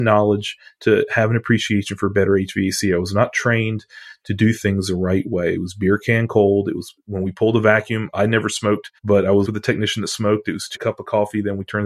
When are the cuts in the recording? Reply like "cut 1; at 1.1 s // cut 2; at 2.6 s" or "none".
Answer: cut 1; at 9.0 s // cut 2; at 9.4 s // cut 3; at 10.7 s